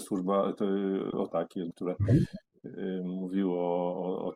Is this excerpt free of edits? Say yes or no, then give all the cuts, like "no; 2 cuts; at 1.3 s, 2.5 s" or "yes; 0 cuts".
no; 2 cuts; at 1.3 s, 1.7 s